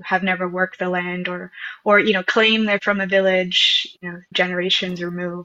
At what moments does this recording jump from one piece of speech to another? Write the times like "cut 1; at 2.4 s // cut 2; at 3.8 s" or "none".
cut 1; at 4.3 s